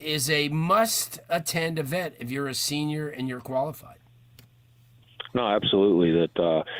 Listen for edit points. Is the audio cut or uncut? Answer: uncut